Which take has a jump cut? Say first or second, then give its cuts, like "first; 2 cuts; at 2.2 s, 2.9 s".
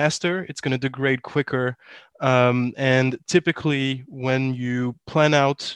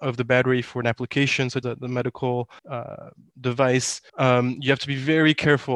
second; 3 cuts; at 1.6 s, 2.6 s, 4.1 s